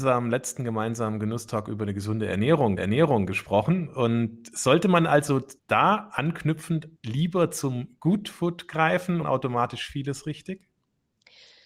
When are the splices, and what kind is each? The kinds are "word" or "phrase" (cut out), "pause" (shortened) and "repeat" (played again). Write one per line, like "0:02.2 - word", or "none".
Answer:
0:02.8 - repeat
0:05.6 - pause
0:07.0 - pause
0:09.2 - phrase